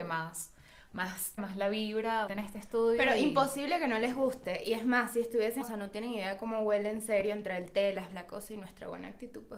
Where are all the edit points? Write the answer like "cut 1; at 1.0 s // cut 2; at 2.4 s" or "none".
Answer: cut 1; at 1.4 s // cut 2; at 2.3 s // cut 3; at 5.6 s // cut 4; at 8.1 s